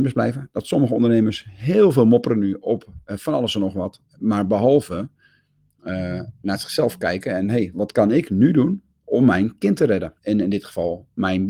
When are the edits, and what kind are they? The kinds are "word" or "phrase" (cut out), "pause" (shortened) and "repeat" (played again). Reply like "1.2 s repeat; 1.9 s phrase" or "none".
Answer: 7.7 s word; 10.2 s pause